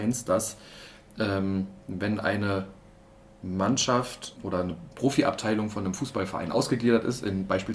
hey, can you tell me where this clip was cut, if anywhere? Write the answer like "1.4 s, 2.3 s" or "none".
4.4 s